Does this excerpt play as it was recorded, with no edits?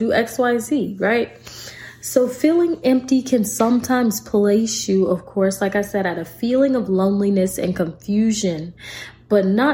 yes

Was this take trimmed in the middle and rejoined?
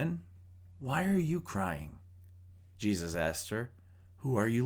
no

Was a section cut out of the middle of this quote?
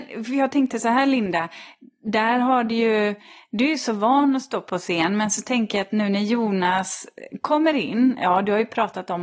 no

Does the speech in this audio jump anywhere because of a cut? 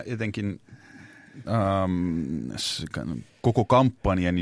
yes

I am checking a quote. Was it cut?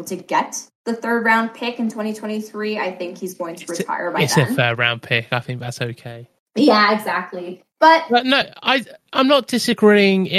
no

